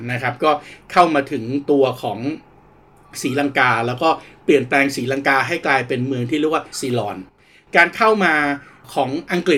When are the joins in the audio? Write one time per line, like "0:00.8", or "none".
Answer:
0:06.7